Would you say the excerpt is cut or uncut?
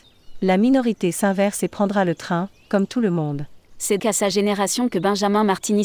cut